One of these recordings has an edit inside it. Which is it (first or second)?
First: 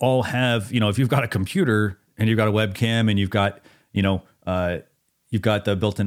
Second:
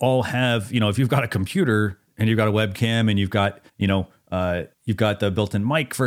second